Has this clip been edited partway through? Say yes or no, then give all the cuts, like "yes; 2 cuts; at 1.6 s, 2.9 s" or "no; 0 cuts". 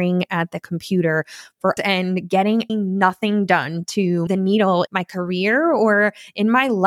yes; 4 cuts; at 1.8 s, 2.7 s, 4.3 s, 4.9 s